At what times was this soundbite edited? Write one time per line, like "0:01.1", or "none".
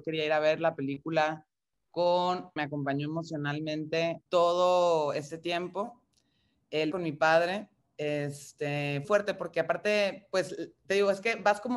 0:02.6
0:04.3
0:06.9
0:07.8
0:09.0